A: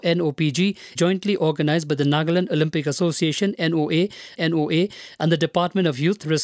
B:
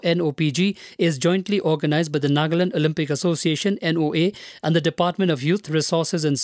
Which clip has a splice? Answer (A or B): A